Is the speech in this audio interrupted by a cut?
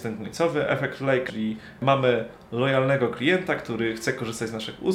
yes; 1 cut; at 1.3 s

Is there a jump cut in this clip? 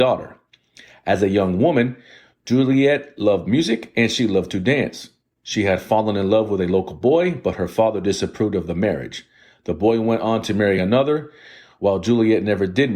no; 0 cuts

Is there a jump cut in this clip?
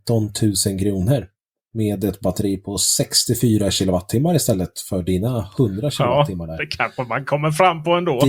no; 0 cuts

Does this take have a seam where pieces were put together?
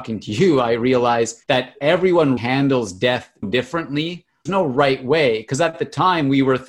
yes; 4 cuts; at 1.4 s, 2.4 s, 3.4 s, 4.5 s

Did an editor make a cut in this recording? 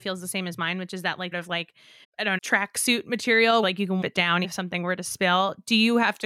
yes; 6 cuts; at 1.3 s, 2.0 s, 2.4 s, 3.6 s, 4.0 s, 4.4 s

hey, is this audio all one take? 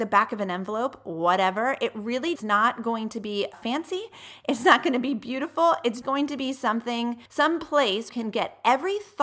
no; 5 cuts; at 2.3 s, 3.5 s, 6.0 s, 7.3 s, 8.1 s

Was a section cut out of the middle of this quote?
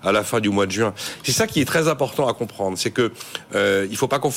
no; 0 cuts

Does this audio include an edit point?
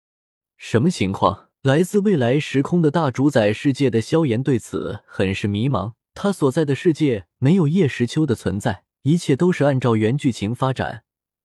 yes; 3 cuts; at 1.6 s, 6.0 s, 8.9 s

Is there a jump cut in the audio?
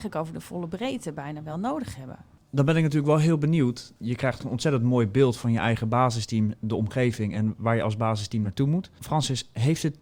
no; 0 cuts

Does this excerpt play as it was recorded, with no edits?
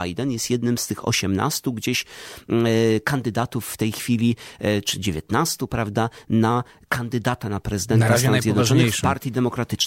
yes; 0 cuts

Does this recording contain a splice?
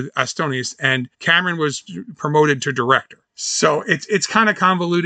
yes; 2 cuts; at 1.1 s, 3.3 s

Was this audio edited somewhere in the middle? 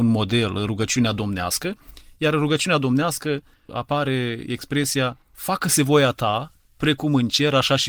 no; 0 cuts

